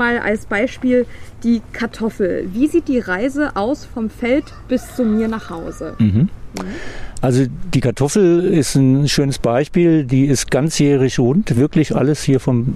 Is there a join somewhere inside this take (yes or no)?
no